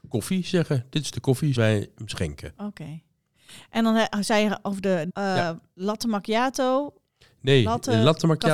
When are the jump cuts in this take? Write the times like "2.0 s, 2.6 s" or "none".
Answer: 1.6 s, 5.1 s